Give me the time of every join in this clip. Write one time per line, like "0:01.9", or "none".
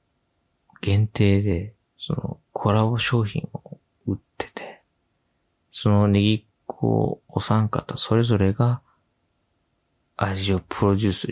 0:01.8
0:02.5
0:03.9